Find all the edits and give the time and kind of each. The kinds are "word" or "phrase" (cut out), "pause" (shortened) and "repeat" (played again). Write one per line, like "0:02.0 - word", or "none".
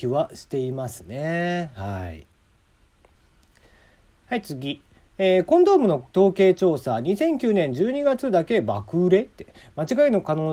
none